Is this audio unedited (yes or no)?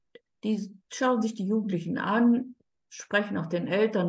yes